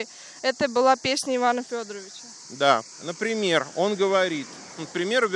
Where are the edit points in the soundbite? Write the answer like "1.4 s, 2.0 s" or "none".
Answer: 2.9 s